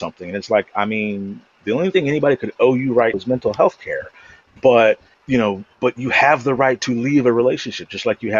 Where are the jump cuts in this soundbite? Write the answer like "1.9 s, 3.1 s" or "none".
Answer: 3.1 s, 5.1 s